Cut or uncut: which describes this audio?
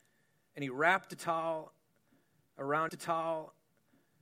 cut